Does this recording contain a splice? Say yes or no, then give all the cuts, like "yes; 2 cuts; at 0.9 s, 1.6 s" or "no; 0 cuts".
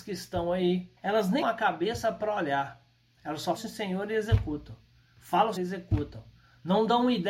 yes; 4 cuts; at 1.0 s, 1.4 s, 3.6 s, 5.6 s